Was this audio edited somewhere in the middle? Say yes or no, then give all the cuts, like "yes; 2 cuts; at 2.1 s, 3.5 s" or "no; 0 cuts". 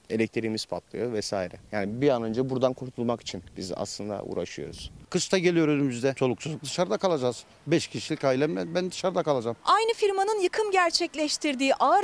no; 0 cuts